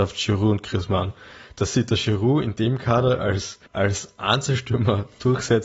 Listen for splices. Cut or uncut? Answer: cut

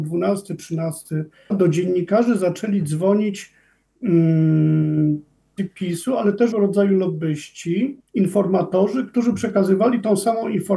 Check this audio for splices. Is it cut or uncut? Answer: cut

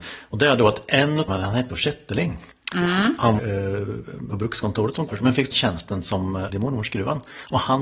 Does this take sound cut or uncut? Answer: cut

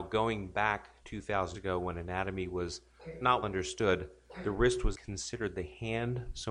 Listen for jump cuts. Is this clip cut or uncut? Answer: cut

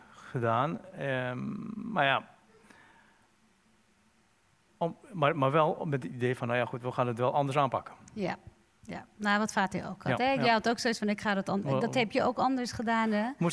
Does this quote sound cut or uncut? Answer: uncut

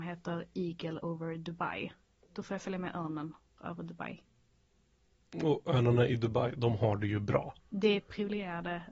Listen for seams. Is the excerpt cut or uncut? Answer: cut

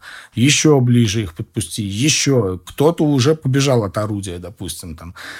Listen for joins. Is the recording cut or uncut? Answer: uncut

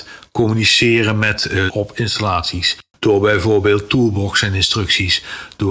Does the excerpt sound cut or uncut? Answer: cut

